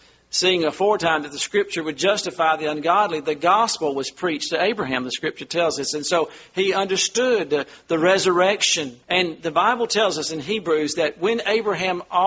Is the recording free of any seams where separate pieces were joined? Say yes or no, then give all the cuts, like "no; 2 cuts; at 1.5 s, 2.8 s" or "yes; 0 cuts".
no; 1 cut; at 9.0 s